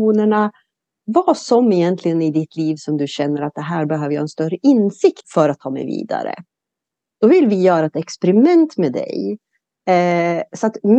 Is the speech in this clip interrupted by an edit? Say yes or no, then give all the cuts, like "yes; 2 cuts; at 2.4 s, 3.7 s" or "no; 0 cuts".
yes; 1 cut; at 5.2 s